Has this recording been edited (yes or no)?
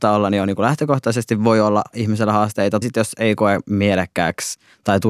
yes